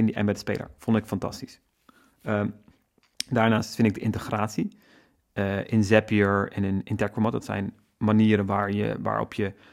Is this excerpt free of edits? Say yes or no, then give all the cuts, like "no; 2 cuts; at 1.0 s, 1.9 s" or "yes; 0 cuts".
yes; 0 cuts